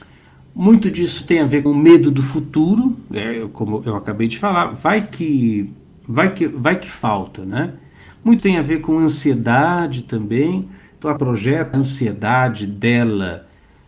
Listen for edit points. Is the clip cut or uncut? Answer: cut